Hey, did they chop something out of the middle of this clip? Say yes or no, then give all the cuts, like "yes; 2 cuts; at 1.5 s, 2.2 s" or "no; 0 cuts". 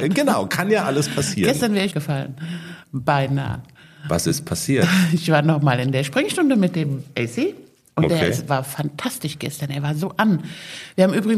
yes; 2 cuts; at 1.9 s, 8.5 s